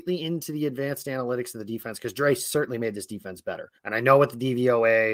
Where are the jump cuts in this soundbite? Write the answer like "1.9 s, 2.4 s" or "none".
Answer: 3.8 s